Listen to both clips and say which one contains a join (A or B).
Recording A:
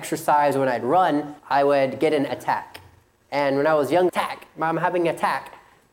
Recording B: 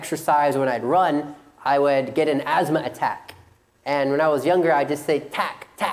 A